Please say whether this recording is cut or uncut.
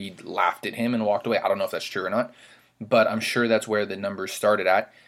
uncut